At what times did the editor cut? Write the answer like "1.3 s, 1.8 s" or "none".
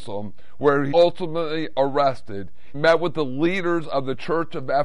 0.9 s, 2.7 s